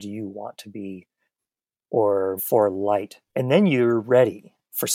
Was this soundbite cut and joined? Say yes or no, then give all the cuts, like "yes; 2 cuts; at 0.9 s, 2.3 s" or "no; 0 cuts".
yes; 2 cuts; at 2.4 s, 3.3 s